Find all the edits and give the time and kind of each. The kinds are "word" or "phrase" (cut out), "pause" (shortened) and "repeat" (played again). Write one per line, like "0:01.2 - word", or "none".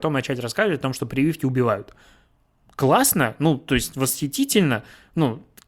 none

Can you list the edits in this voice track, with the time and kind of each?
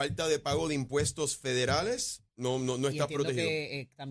0:02.3 - pause

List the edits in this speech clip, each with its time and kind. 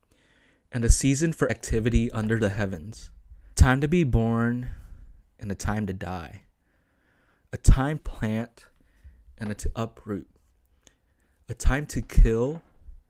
0:01.5 - word
0:03.5 - word
0:08.0 - word
0:09.6 - word

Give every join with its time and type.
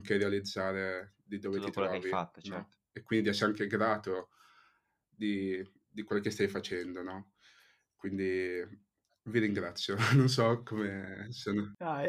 none

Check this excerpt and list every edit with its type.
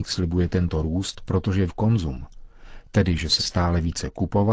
0:01.7 - word
0:03.4 - word

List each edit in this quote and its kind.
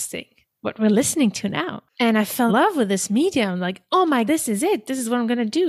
0:01.9 - pause
0:02.5 - word
0:04.3 - word

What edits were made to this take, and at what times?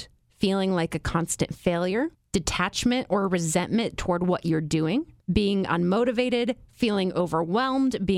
0:02.1 - pause
0:05.2 - pause

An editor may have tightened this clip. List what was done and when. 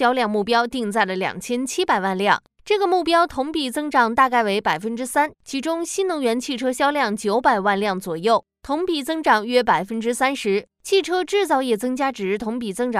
0:05.3 - pause

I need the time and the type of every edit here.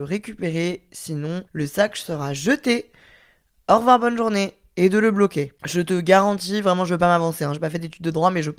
0:01.5 - pause

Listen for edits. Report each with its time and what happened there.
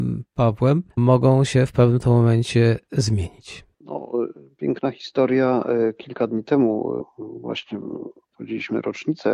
0:00.9 - pause
0:03.7 - pause

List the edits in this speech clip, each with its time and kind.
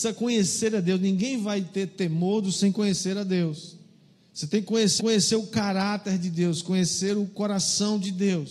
0:02.5 - word
0:04.1 - pause
0:05.0 - repeat

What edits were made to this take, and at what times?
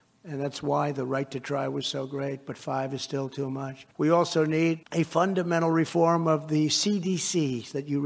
0:03.9 - pause
0:04.8 - pause

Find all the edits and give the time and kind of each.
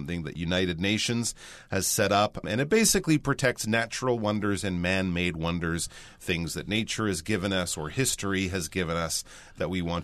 none

